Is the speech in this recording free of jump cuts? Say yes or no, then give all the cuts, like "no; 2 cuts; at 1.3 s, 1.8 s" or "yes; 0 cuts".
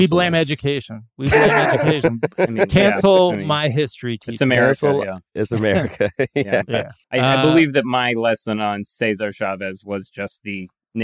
no; 1 cut; at 7.0 s